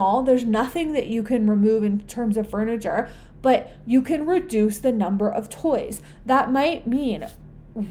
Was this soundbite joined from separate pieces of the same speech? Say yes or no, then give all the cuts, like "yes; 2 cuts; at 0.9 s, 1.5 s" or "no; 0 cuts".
no; 0 cuts